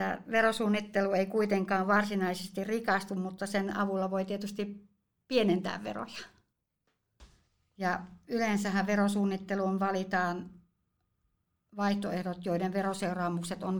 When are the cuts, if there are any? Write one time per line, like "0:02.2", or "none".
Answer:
none